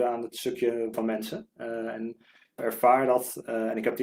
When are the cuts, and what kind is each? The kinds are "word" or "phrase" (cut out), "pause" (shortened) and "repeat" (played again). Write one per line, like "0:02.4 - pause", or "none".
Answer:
0:00.9 - word
0:02.6 - phrase